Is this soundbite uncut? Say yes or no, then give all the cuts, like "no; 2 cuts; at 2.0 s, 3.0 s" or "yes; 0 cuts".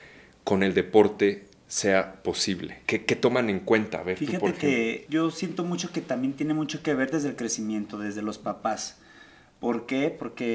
yes; 0 cuts